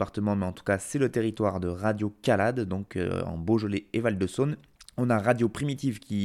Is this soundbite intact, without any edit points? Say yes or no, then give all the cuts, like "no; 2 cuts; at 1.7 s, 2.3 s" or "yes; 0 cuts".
no; 1 cut; at 4.8 s